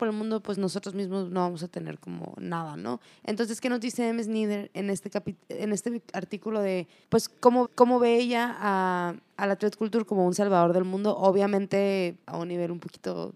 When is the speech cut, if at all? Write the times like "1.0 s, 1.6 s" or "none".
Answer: 7.0 s, 7.6 s, 12.2 s

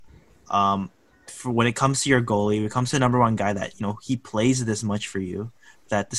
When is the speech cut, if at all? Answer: none

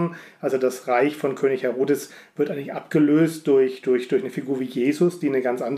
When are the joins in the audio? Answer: none

